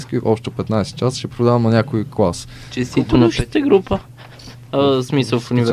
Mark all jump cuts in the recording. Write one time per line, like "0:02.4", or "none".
none